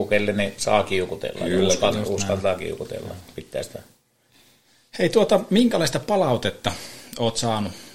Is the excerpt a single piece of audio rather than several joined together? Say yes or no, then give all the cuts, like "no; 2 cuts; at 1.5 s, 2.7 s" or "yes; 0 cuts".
yes; 0 cuts